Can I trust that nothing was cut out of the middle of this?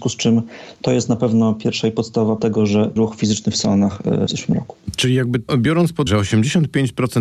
no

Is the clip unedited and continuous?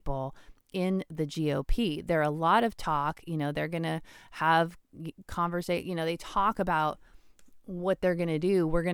yes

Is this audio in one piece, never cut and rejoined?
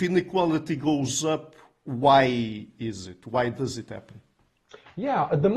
yes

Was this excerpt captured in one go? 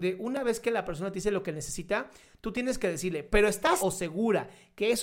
no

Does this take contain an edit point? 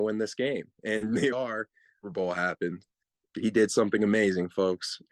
yes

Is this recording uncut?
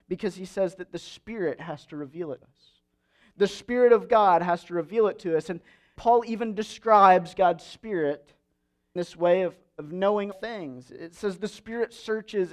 no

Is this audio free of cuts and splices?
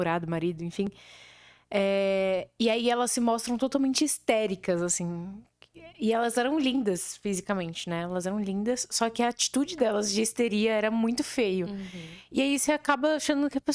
yes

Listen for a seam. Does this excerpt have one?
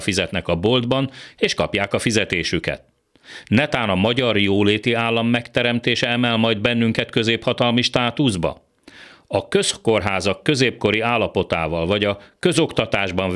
no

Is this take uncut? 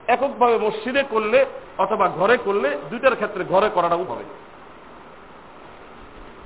no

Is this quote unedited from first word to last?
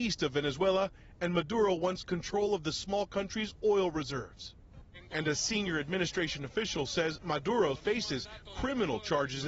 no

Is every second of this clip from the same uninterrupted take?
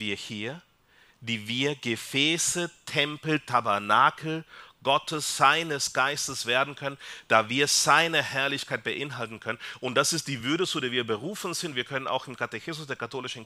yes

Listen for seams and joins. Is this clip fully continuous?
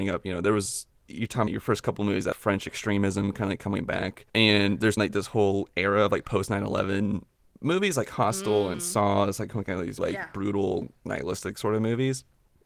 no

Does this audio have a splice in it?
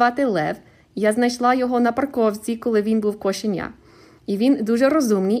no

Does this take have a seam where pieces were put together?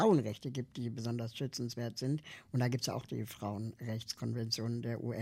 no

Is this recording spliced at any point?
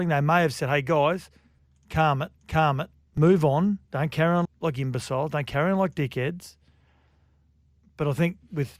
yes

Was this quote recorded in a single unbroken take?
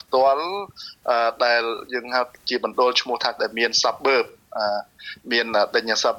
no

